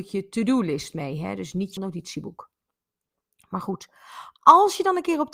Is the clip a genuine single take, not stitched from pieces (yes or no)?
no